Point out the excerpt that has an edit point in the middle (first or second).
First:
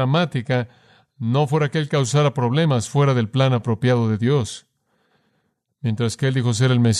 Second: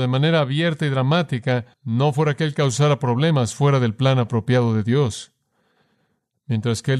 second